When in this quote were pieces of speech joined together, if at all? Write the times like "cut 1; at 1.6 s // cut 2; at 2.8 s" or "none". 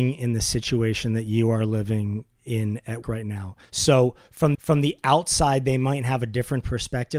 cut 1; at 3.0 s // cut 2; at 3.6 s // cut 3; at 4.5 s